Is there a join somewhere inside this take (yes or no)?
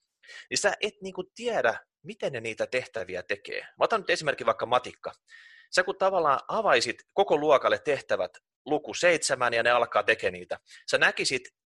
no